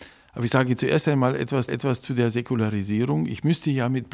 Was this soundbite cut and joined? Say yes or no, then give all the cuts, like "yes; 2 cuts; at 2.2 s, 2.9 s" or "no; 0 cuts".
yes; 1 cut; at 1.7 s